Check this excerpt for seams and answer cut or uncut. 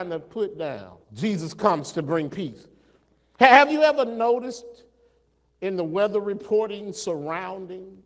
cut